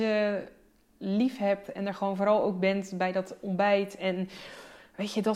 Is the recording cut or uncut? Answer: uncut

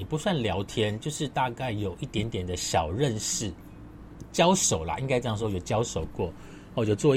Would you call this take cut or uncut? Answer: uncut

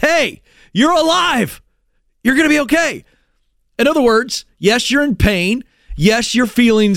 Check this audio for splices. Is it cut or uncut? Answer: uncut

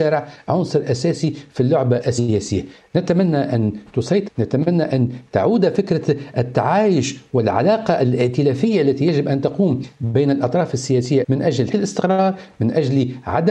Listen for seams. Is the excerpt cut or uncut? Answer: cut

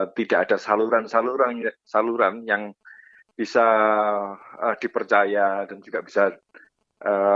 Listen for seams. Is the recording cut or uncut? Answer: uncut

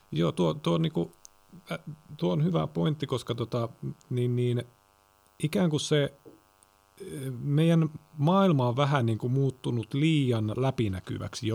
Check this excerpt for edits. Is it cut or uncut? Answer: uncut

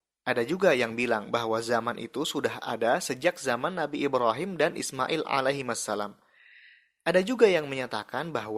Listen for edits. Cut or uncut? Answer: uncut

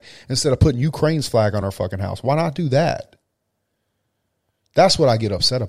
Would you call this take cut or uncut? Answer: uncut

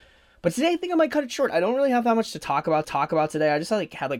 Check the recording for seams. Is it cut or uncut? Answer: cut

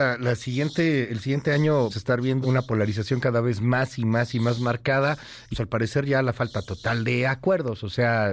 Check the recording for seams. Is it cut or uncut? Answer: cut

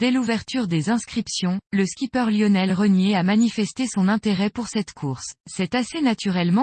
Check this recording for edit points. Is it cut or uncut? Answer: cut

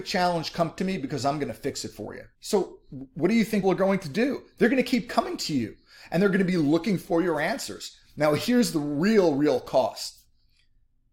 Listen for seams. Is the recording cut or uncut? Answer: cut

